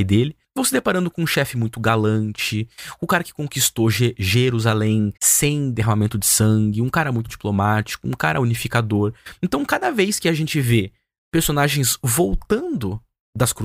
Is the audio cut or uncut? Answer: cut